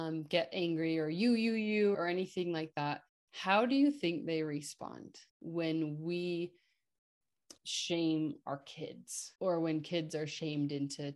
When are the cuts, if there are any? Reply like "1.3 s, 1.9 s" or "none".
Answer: 1.9 s, 3.1 s, 5.3 s, 7.6 s, 9.3 s